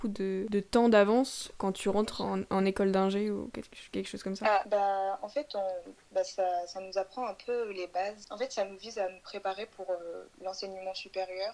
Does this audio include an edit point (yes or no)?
no